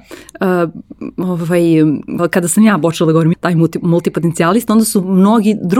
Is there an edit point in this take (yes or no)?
yes